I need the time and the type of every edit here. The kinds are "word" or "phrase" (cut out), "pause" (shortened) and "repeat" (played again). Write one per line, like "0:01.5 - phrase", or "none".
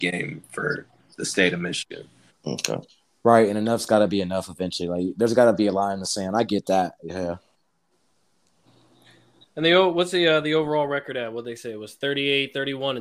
none